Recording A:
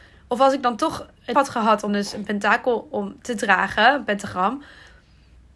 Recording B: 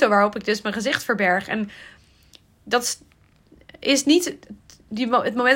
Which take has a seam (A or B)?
A